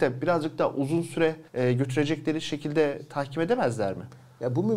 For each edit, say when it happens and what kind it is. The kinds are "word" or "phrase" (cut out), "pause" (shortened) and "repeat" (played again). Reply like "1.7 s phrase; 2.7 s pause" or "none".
1.5 s pause